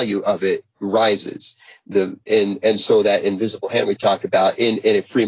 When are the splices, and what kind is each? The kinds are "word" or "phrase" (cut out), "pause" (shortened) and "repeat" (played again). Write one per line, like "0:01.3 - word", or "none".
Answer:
none